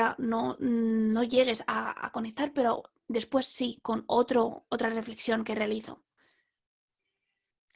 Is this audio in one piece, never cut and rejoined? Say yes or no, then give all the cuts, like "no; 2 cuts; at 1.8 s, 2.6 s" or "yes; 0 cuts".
yes; 0 cuts